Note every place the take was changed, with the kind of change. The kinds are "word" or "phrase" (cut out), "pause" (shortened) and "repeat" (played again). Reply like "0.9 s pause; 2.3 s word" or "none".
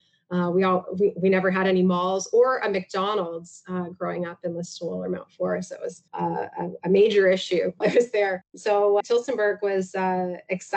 6.1 s pause; 7.8 s phrase; 9.0 s word

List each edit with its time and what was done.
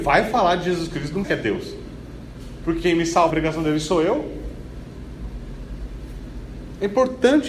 1.2 s word; 3.3 s word

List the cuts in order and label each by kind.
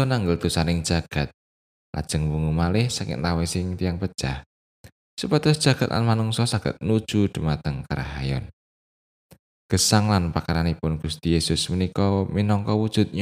none

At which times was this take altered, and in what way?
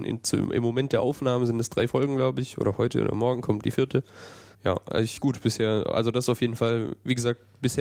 4.5 s pause; 5.2 s word

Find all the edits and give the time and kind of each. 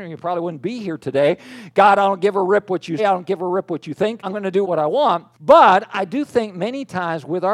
3.0 s word; 4.2 s word; 4.6 s word; 5.3 s pause

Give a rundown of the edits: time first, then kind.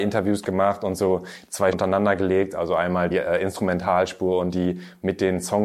1.7 s word; 3.1 s word

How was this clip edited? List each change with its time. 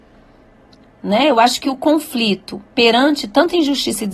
none

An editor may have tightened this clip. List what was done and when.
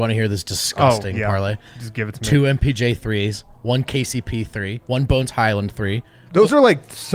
4.8 s pause

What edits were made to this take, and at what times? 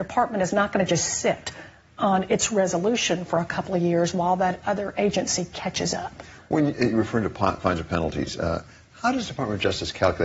none

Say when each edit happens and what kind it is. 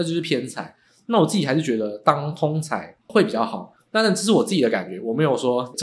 3.0 s pause

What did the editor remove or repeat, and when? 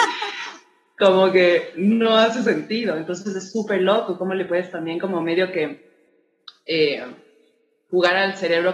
none

